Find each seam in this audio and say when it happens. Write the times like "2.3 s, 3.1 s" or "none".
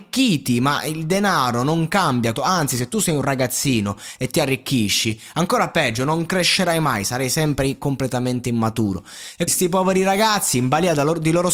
2.4 s, 9.5 s